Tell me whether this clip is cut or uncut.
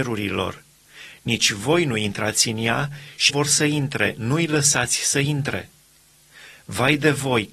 cut